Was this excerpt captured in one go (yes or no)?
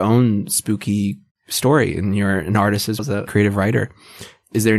no